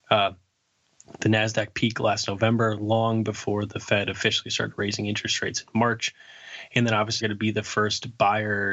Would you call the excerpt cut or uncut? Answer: cut